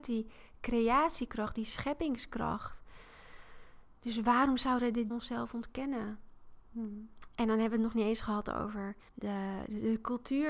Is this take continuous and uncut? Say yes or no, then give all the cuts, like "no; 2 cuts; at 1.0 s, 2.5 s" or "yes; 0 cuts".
no; 2 cuts; at 5.1 s, 9.1 s